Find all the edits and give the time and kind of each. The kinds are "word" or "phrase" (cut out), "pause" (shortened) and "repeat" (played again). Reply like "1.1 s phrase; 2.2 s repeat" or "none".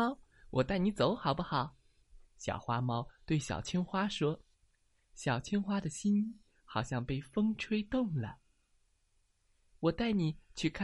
4.5 s pause

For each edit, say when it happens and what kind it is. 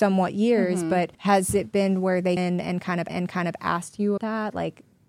1.1 s pause; 2.4 s word; 3.1 s repeat; 4.2 s word

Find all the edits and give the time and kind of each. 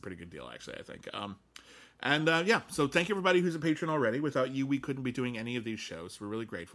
none

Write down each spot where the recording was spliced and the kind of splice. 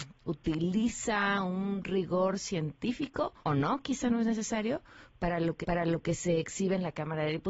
3.4 s pause; 5.6 s repeat

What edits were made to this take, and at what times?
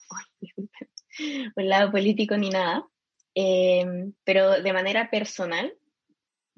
none

